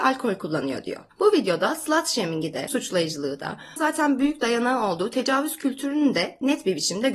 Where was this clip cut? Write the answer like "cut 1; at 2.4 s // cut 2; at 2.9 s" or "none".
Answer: cut 1; at 1.1 s // cut 2; at 2.7 s // cut 3; at 3.8 s